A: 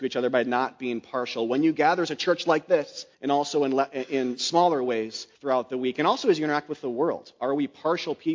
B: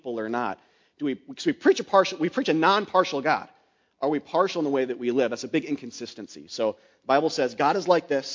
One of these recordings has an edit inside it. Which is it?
A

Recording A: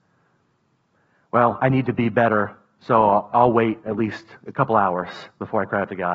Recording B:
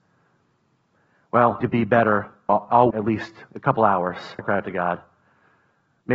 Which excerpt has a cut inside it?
B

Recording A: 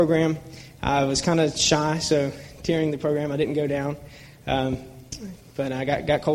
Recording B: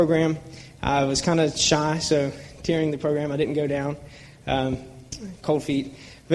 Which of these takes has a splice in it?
B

